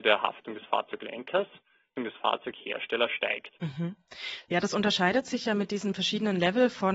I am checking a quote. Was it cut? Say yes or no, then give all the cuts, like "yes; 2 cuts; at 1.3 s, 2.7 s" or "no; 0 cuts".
yes; 2 cuts; at 2.0 s, 3.6 s